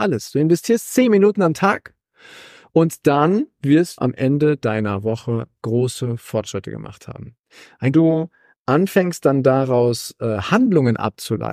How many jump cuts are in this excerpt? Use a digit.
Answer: 2